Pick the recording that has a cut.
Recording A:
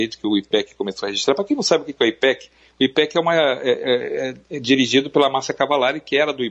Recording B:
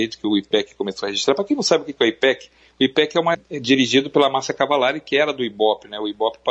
B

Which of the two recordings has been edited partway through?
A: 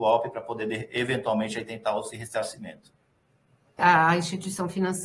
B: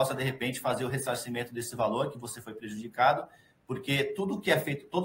A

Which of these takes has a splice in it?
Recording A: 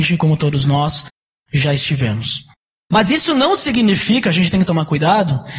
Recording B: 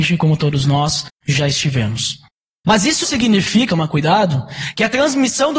B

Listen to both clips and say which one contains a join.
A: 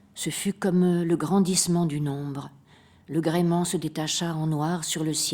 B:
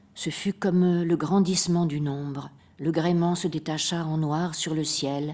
B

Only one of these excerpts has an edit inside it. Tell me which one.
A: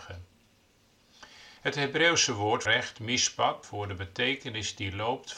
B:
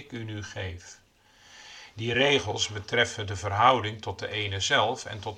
A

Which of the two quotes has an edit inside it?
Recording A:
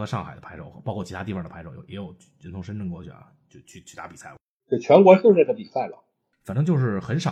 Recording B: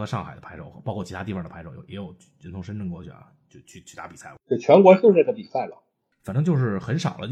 B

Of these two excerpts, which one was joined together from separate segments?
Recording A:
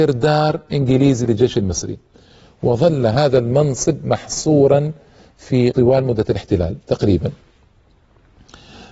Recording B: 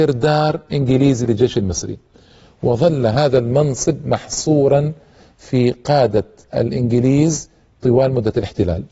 A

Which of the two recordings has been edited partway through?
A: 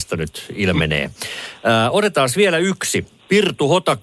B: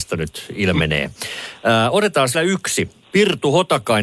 B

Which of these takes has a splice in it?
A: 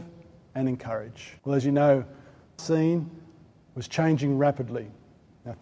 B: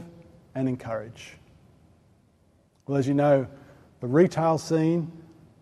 A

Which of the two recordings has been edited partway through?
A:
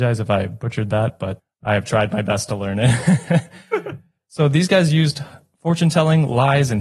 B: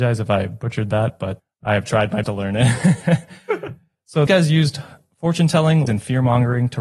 B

